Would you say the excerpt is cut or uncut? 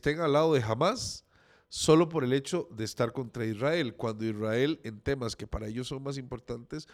uncut